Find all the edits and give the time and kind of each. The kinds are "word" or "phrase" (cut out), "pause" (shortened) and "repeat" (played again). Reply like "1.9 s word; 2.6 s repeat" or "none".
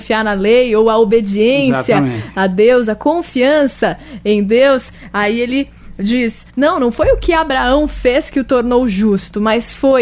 6.5 s pause